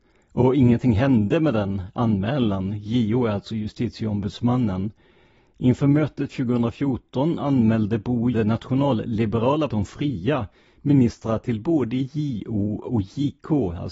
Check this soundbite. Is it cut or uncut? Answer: cut